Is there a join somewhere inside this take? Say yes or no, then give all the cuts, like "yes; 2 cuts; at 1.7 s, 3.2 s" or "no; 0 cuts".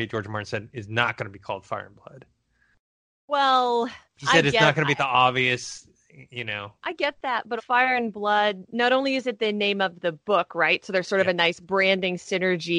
yes; 3 cuts; at 4.0 s, 6.8 s, 7.6 s